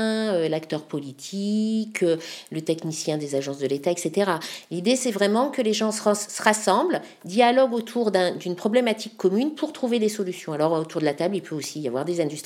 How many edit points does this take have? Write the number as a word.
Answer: zero